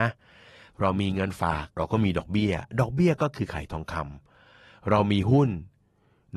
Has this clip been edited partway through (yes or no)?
yes